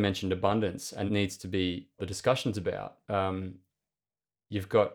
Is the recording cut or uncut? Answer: cut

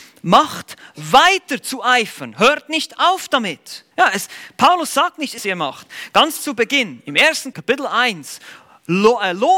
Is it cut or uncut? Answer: cut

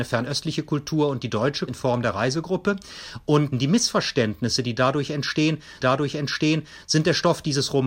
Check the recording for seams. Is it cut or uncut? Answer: cut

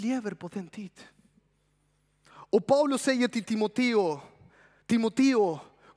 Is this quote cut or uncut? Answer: uncut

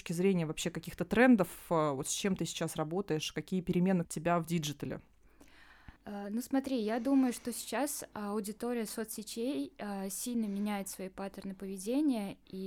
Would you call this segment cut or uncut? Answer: cut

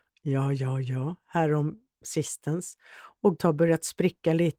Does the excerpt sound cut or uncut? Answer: cut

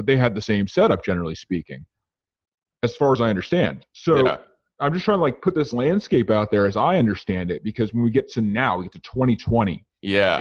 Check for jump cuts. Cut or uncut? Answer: uncut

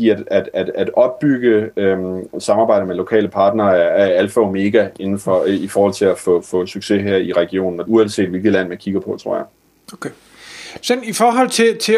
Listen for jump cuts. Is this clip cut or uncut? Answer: cut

